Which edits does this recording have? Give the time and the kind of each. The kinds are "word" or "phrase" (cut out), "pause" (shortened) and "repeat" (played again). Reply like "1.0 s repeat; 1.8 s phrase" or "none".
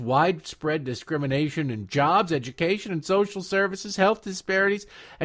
none